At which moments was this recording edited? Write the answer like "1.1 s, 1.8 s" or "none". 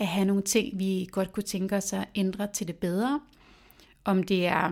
none